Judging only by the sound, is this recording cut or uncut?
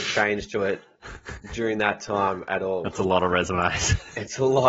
uncut